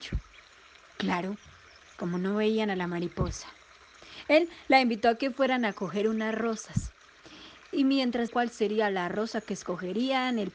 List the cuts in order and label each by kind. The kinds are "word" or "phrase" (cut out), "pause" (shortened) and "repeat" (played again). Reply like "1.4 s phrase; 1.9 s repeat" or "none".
8.3 s phrase